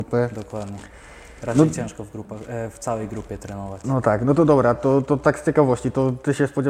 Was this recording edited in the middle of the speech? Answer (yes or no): no